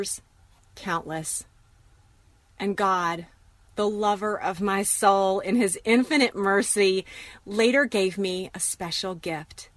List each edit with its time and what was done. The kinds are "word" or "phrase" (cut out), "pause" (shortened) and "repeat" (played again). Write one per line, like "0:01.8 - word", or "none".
none